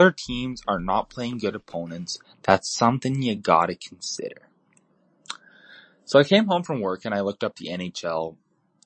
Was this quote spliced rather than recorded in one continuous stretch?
no; 0 cuts

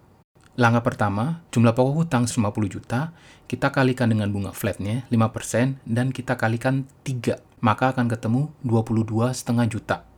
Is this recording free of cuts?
no; 2 cuts; at 1.5 s, 2.3 s

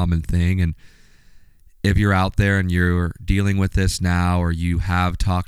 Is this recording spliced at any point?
no; 0 cuts

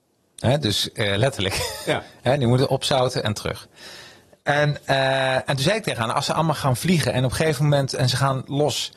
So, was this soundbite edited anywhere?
no; 0 cuts

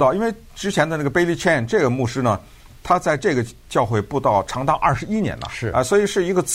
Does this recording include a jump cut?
no; 0 cuts

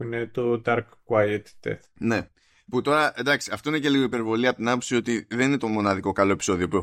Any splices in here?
no; 0 cuts

